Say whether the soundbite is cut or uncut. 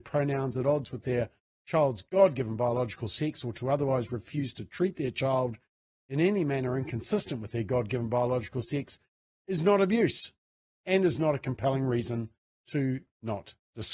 uncut